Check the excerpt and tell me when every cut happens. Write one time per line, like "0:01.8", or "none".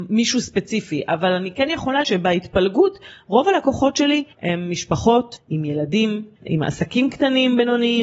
0:02.0
0:04.3